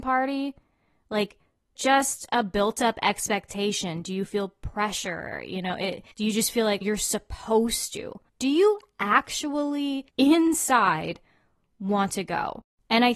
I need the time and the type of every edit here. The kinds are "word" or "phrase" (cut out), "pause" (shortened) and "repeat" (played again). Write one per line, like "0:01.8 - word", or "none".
0:01.8 - phrase
0:06.1 - pause
0:06.8 - word
0:08.3 - pause
0:10.1 - pause